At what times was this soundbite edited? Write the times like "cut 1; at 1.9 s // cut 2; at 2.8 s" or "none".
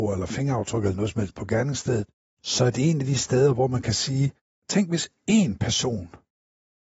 none